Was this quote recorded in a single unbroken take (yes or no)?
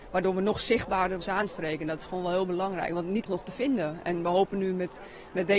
no